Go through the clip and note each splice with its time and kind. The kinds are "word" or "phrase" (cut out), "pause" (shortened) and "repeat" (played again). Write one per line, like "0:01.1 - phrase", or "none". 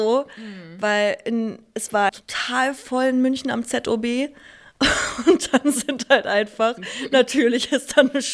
0:02.1 - word